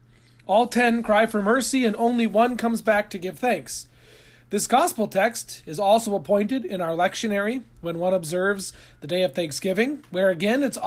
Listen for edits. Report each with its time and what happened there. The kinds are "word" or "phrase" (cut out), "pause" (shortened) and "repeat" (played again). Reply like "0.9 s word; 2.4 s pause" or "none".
none